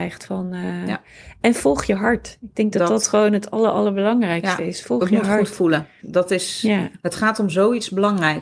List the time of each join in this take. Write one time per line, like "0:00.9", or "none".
none